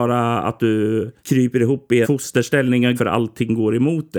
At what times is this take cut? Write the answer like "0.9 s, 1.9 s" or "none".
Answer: 2.0 s, 3.0 s